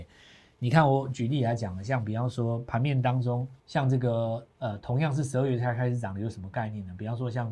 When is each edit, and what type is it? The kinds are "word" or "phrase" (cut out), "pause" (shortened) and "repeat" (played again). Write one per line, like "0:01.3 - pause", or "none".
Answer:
0:03.6 - pause